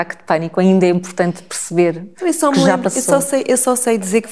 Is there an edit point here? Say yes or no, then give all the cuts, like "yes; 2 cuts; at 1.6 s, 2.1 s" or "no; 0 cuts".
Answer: no; 0 cuts